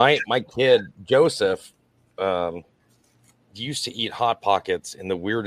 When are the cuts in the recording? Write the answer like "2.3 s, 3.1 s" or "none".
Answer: none

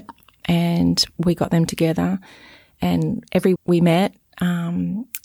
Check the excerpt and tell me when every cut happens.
3.6 s

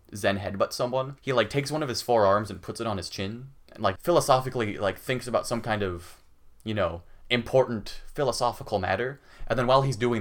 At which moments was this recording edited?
1.2 s, 3.6 s, 4.0 s

